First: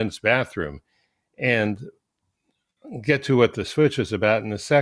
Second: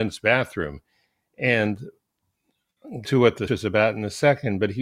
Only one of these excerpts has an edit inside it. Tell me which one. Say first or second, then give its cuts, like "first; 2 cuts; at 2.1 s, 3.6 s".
second; 2 cuts; at 3.0 s, 3.5 s